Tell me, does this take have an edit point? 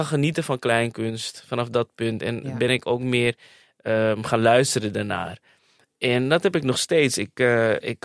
no; 0 cuts

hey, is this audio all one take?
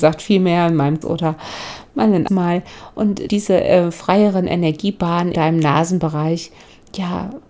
no; 4 cuts; at 1.0 s, 2.3 s, 3.3 s, 5.3 s

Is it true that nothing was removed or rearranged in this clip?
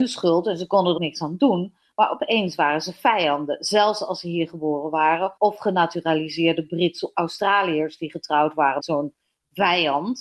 no; 4 cuts; at 1.0 s, 5.4 s, 7.1 s, 8.8 s

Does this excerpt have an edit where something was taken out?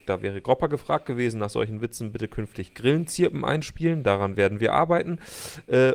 no; 0 cuts

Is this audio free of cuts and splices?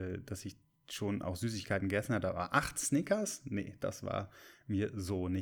yes; 0 cuts

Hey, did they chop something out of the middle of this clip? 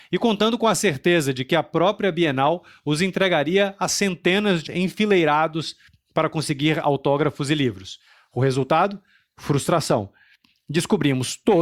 yes; 1 cut; at 4.7 s

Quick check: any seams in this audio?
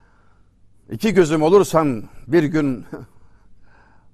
no; 0 cuts

